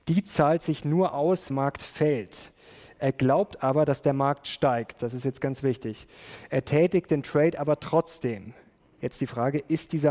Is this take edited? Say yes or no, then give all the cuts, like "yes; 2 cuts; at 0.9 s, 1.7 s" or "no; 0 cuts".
yes; 1 cut; at 1.5 s